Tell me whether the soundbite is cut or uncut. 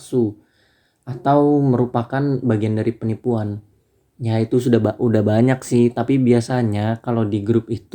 uncut